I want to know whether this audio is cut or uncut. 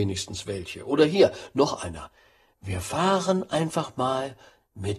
uncut